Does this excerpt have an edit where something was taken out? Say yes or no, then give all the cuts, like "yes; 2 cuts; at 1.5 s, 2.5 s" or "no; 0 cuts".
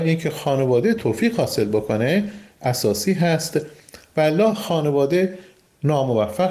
no; 0 cuts